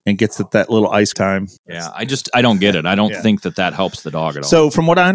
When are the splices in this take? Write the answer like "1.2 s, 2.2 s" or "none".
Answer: 1.1 s, 1.6 s